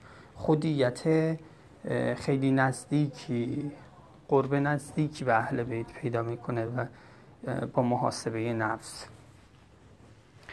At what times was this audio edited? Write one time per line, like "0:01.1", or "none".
none